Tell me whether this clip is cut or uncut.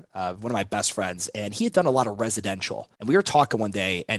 cut